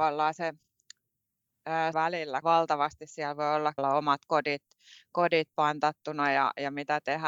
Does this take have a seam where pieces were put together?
yes; 3 cuts; at 1.9 s, 2.4 s, 3.8 s

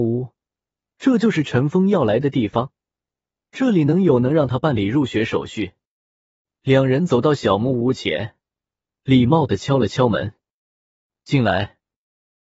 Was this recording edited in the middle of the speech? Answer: no; 0 cuts

